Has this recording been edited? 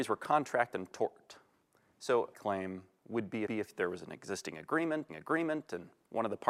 yes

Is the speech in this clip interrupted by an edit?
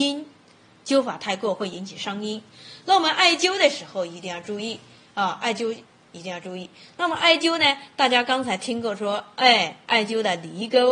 no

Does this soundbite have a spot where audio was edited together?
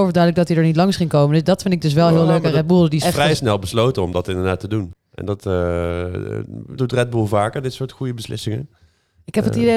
yes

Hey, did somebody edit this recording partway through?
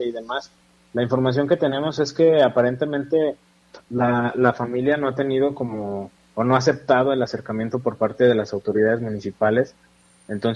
no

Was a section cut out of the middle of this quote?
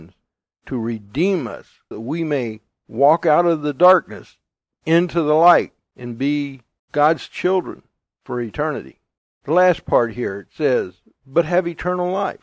yes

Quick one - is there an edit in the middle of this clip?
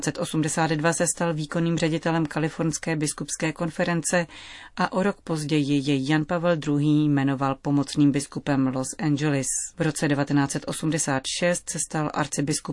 yes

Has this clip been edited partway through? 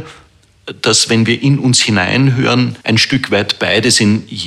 yes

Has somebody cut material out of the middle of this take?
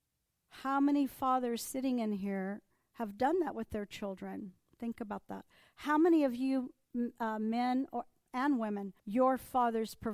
yes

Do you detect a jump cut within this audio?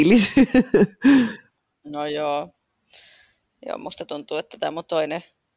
no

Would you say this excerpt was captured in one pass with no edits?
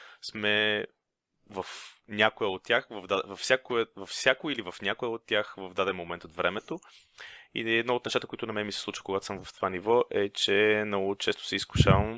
yes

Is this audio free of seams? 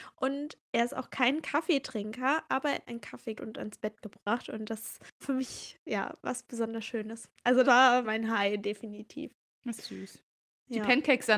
no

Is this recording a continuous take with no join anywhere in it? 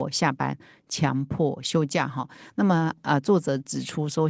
yes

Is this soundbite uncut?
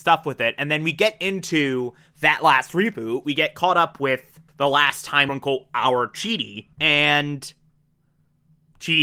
no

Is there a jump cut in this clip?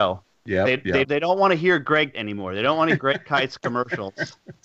yes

